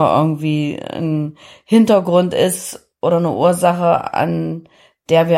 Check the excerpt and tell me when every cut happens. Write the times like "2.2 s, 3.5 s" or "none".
none